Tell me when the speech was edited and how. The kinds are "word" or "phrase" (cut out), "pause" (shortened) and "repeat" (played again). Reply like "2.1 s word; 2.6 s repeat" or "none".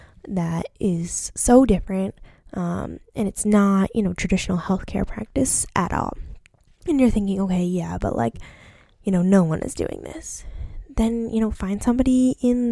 none